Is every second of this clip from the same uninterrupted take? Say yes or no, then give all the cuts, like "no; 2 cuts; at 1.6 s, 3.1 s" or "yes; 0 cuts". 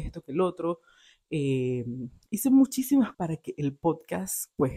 no; 1 cut; at 3.1 s